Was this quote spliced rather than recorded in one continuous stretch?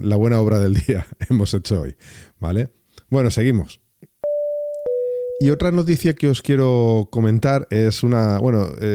no; 0 cuts

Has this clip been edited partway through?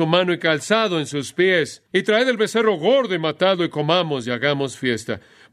yes; 1 cut; at 1.9 s

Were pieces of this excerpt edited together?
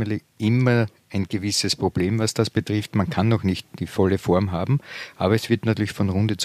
yes; 1 cut; at 3.6 s

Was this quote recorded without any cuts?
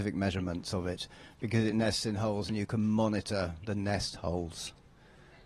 yes; 0 cuts

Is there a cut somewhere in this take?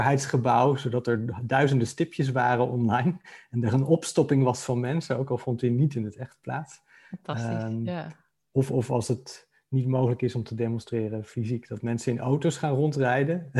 no; 0 cuts

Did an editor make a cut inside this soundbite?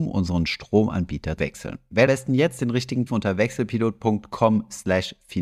yes; 3 cuts; at 1.4 s, 2.1 s, 3.1 s

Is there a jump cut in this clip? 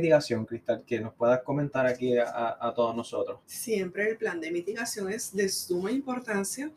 yes; 1 cut; at 3.4 s

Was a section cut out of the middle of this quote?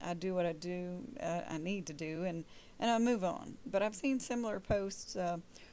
no; 0 cuts

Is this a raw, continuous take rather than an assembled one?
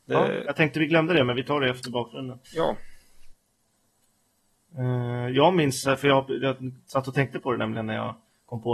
no; 1 cut; at 2.4 s

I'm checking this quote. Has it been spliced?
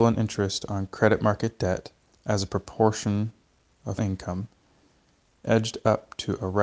yes; 2 cuts; at 2.1 s, 4.0 s

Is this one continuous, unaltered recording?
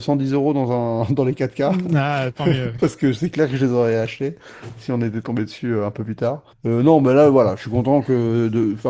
no; 1 cut; at 6.5 s

